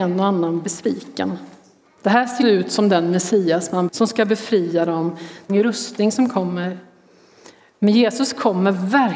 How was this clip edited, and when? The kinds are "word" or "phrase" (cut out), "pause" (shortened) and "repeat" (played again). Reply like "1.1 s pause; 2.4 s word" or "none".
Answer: 2.4 s word; 3.9 s word; 5.5 s phrase